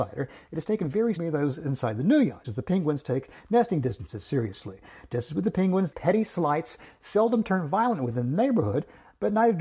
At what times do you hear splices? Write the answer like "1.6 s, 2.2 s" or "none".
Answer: 1.2 s, 2.4 s, 5.9 s